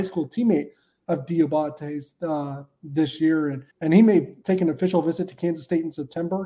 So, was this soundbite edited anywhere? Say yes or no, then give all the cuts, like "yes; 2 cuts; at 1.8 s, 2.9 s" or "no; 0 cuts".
yes; 1 cut; at 3.7 s